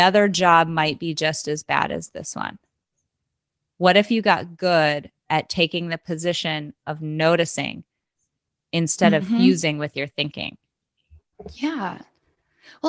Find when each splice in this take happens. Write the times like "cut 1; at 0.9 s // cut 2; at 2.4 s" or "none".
none